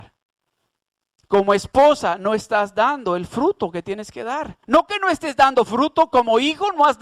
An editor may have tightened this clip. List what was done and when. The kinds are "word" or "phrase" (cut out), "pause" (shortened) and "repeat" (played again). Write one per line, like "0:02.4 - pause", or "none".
0:04.6 - pause